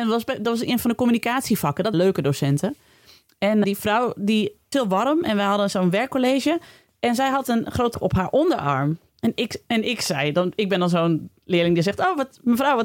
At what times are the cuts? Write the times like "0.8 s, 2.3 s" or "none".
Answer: 1.9 s, 3.6 s, 4.7 s, 7.9 s